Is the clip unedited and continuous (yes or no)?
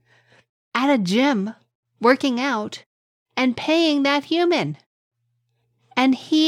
yes